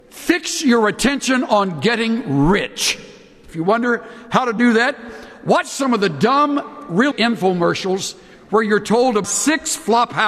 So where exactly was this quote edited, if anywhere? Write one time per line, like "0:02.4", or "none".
0:07.1
0:09.2